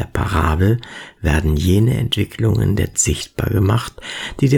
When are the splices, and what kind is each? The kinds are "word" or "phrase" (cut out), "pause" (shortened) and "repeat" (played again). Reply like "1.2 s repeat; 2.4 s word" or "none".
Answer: 2.9 s word